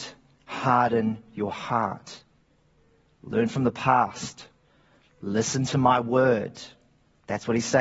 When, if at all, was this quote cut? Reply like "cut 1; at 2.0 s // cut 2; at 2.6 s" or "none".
none